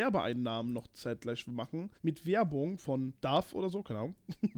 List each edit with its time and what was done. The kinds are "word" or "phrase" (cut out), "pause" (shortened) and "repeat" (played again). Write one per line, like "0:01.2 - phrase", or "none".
0:02.0 - pause
0:03.2 - pause